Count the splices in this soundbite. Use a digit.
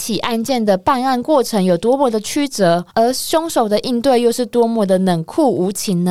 1